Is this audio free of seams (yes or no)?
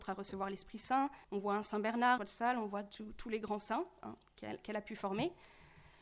no